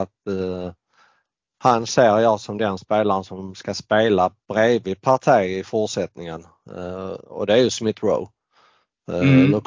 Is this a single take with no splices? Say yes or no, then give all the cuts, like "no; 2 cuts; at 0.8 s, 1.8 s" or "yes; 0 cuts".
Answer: yes; 0 cuts